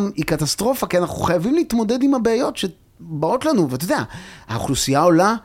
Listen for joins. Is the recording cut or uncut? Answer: uncut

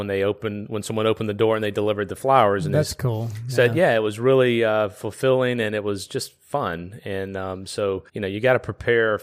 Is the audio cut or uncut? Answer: cut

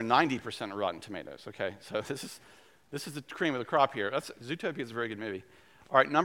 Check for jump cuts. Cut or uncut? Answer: uncut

